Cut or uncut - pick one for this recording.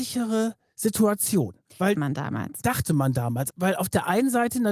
cut